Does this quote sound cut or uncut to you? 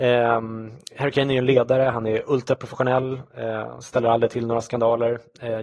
uncut